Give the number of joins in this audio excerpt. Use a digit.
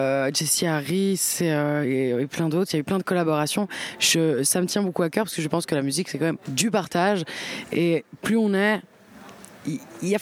1